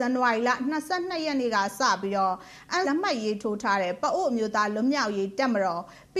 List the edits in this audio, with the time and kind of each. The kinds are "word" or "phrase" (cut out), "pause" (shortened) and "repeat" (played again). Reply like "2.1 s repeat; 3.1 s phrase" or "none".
2.8 s word